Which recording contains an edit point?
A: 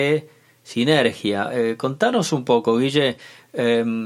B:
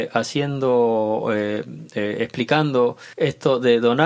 B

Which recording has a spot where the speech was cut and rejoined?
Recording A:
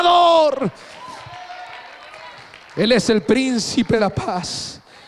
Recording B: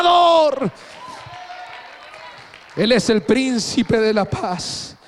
A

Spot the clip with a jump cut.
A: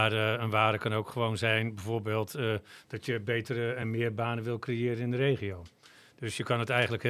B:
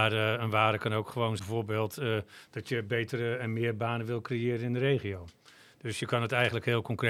B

